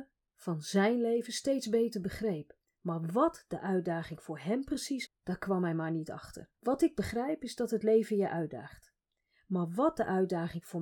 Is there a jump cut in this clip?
yes; 3 cuts; at 2.7 s, 5.1 s, 6.5 s

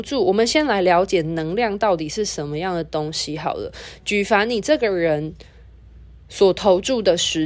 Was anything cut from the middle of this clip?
no; 0 cuts

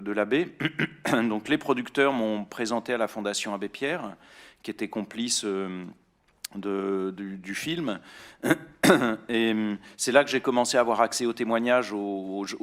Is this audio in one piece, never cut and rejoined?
yes; 0 cuts

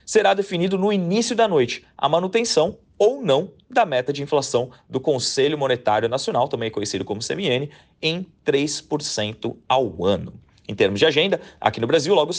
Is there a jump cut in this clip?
no; 0 cuts

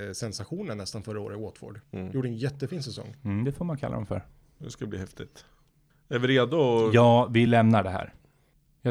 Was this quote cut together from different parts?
no; 0 cuts

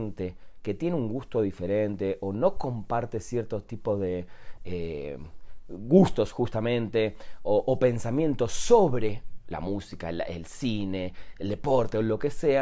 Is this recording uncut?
yes; 0 cuts

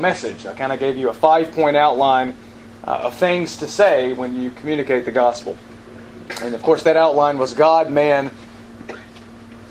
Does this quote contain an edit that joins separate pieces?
no; 0 cuts

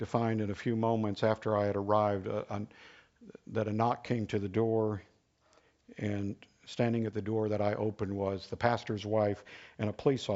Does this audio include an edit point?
no; 0 cuts

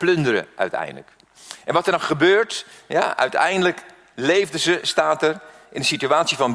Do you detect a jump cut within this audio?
no; 0 cuts

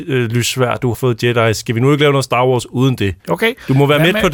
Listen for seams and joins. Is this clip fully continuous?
no; 2 cuts; at 0.9 s, 3.2 s

